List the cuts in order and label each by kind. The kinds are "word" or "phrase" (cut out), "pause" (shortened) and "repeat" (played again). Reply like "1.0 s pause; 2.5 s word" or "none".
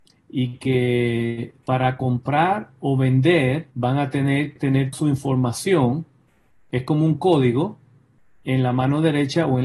1.6 s word; 3.7 s pause; 4.6 s word; 4.9 s word